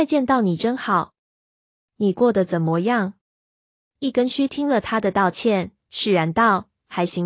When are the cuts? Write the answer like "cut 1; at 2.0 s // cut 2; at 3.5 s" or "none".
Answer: none